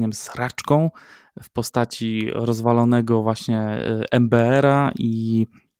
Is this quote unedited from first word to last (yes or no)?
yes